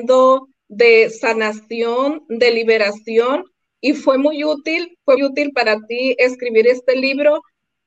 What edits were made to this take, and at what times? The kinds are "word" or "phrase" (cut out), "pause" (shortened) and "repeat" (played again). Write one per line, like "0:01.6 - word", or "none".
0:05.2 - word